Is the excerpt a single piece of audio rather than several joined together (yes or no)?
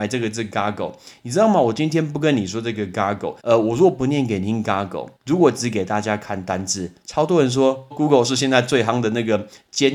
no